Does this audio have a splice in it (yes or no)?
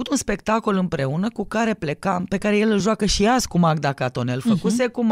no